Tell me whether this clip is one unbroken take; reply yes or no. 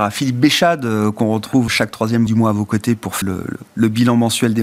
no